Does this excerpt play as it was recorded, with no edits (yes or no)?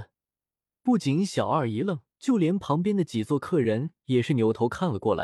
no